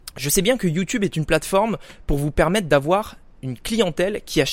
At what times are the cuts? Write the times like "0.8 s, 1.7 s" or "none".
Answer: none

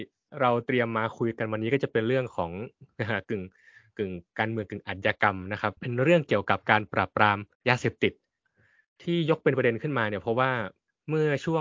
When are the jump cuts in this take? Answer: 5.8 s

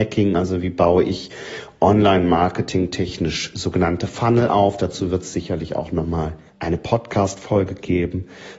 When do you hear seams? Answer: 6.5 s

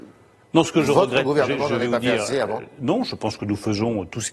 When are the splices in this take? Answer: none

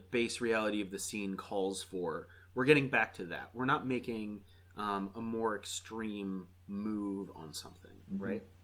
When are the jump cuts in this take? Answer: none

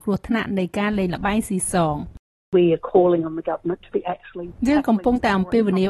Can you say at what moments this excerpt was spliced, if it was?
none

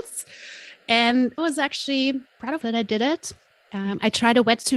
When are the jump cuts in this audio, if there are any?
1.4 s, 2.6 s

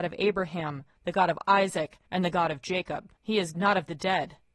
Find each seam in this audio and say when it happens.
2.1 s, 3.2 s, 3.5 s

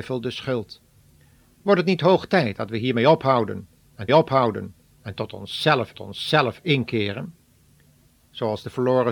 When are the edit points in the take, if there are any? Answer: 4.1 s, 5.9 s

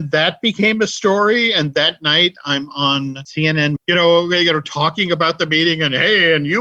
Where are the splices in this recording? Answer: 3.8 s

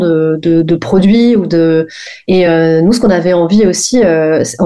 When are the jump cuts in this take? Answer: none

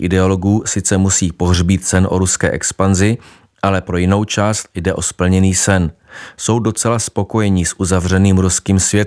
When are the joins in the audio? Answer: none

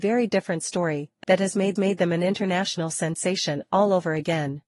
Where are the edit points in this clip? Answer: 1.2 s, 1.8 s

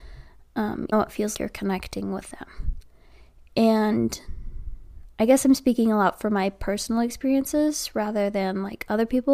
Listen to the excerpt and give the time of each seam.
0.9 s, 1.3 s

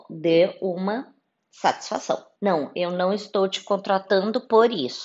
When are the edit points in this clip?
2.4 s

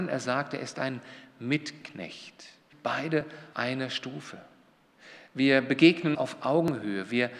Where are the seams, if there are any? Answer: 2.7 s, 3.5 s, 6.1 s

